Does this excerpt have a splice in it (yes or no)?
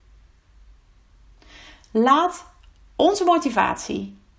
no